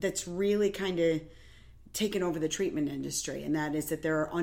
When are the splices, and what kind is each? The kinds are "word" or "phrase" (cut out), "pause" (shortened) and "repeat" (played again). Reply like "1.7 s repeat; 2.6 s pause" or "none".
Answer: none

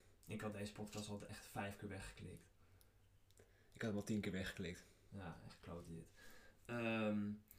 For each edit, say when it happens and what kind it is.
none

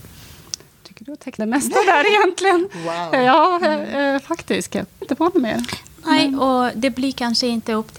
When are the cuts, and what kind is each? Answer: 1.4 s word; 5.0 s word

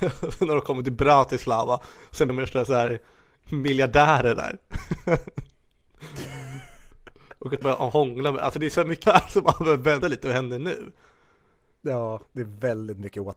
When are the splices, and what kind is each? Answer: 2.3 s word; 7.6 s word; 9.0 s word; 10.0 s word

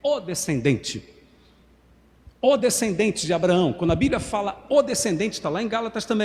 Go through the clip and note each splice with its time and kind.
none

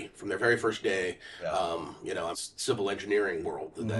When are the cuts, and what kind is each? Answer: 2.3 s phrase

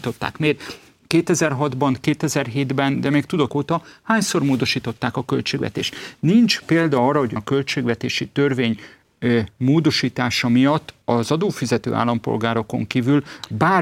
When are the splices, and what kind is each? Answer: 3.5 s phrase; 7.4 s word; 11.0 s pause

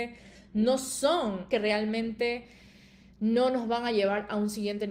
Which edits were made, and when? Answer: 1.5 s phrase

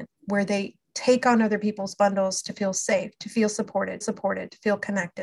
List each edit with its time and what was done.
4.0 s repeat

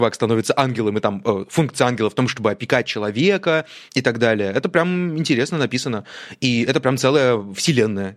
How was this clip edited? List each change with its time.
3.9 s pause

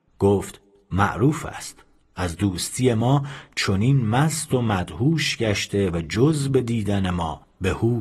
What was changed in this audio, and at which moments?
2.0 s pause

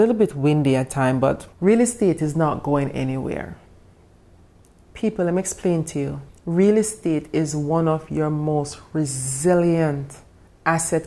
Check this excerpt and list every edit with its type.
1.5 s pause; 6.3 s pause

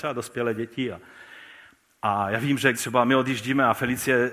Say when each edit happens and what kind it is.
2.7 s word

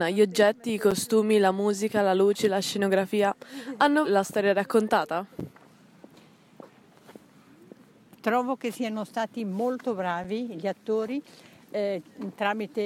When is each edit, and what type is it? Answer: 4.0 s word

